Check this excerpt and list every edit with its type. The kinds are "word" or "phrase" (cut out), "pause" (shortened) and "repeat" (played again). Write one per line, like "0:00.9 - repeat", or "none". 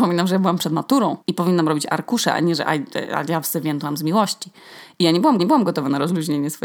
0:01.2 - pause
0:05.4 - repeat